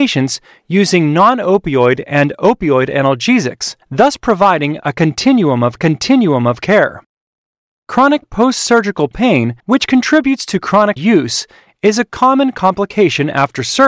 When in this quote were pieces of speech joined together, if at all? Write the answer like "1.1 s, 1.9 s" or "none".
3.8 s, 5.8 s, 9.6 s, 11.0 s